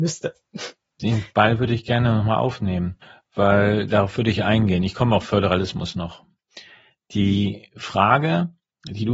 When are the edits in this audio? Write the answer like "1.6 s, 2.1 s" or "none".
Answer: none

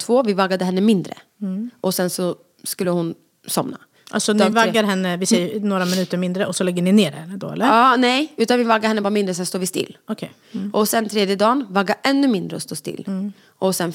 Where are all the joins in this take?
none

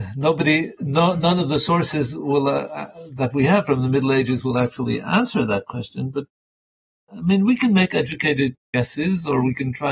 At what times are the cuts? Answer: none

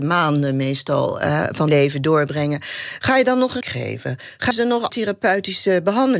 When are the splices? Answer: 1.7 s, 3.6 s, 4.5 s, 4.9 s

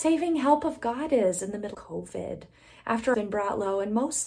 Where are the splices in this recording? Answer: 1.7 s, 3.1 s

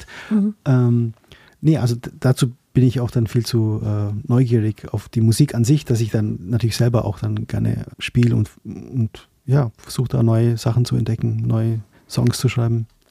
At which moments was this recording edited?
1.3 s, 7.9 s, 8.6 s

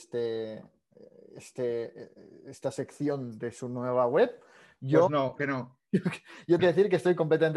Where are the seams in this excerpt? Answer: 5.4 s, 6.6 s

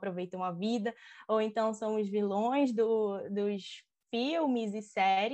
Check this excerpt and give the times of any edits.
none

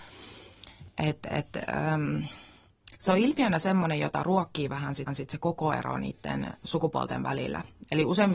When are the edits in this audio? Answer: 3.0 s, 5.1 s

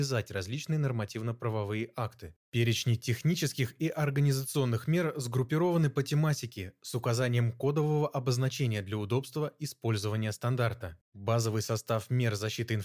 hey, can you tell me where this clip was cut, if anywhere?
2.4 s, 11.0 s

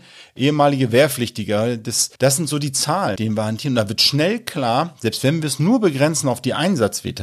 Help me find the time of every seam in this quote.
2.2 s, 3.2 s

